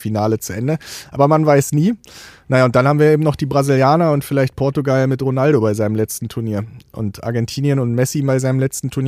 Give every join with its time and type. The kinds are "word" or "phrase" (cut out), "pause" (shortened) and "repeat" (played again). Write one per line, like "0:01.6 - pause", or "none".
none